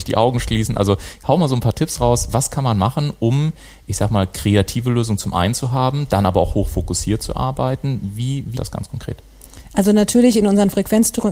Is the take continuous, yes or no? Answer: no